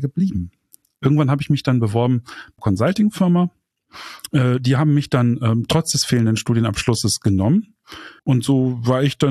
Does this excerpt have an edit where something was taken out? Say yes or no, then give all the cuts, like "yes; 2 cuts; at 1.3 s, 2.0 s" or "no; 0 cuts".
yes; 2 cuts; at 2.6 s, 8.2 s